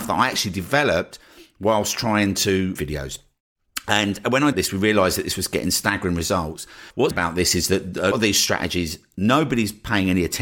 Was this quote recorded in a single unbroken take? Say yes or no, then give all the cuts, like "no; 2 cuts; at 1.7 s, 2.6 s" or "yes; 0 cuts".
no; 4 cuts; at 2.8 s, 4.5 s, 7.1 s, 8.1 s